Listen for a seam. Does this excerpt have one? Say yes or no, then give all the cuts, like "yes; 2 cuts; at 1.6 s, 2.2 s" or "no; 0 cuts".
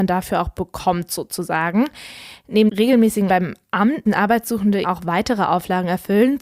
yes; 4 cuts; at 2.7 s, 3.3 s, 4.1 s, 4.8 s